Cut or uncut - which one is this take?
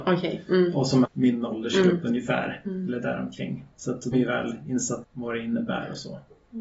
cut